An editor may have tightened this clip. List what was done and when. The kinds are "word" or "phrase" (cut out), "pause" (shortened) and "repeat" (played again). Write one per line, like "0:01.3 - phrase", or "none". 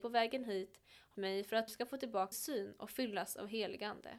0:01.1 - word
0:01.7 - word
0:02.3 - word

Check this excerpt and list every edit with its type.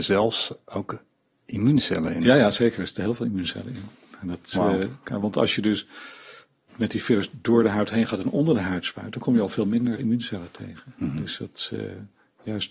0:06.7 - word
0:10.0 - word

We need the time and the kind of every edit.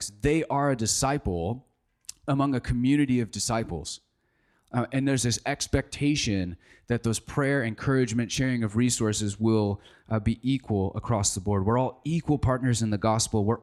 none

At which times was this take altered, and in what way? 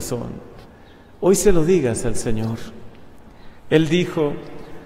0:03.6 - pause

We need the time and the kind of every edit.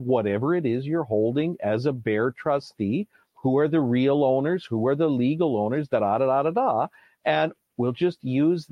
none

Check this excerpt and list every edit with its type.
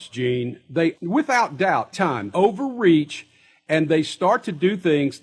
0:00.9 - word
0:01.9 - word
0:02.3 - word

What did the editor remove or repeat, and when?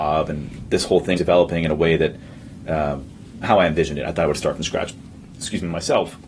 0:01.2 - word
0:03.4 - word

